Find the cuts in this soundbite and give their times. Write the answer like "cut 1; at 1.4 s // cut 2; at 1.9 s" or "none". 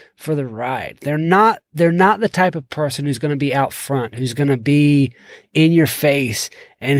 cut 1; at 1.7 s

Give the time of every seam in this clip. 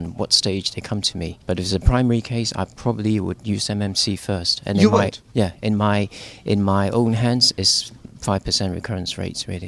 cut 1; at 1.4 s

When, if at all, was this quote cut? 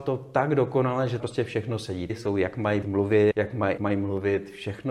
cut 1; at 1.2 s // cut 2; at 2.1 s // cut 3; at 2.8 s // cut 4; at 3.3 s // cut 5; at 3.8 s

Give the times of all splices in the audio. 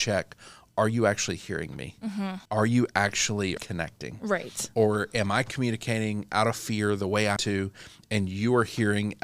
cut 1; at 2.5 s // cut 2; at 3.6 s // cut 3; at 7.4 s

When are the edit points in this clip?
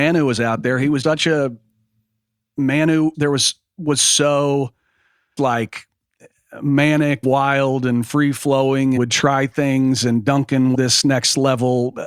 cut 1; at 1.0 s // cut 2; at 3.1 s // cut 3; at 5.4 s // cut 4; at 7.2 s // cut 5; at 9.0 s // cut 6; at 10.7 s

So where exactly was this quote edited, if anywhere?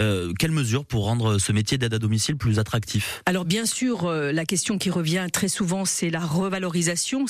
none

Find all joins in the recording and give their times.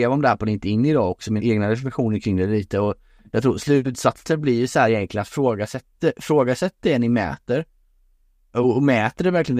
cut 1; at 1.4 s // cut 2; at 5.9 s

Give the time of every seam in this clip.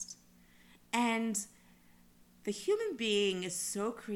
none

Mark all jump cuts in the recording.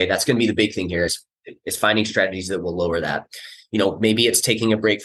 none

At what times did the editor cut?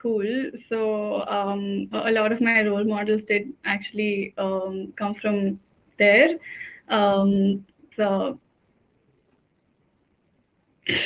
cut 1; at 7.9 s

